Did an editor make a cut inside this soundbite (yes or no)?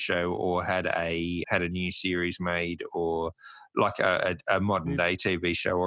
yes